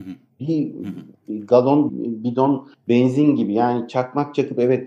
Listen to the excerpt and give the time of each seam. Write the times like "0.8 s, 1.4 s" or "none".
1.9 s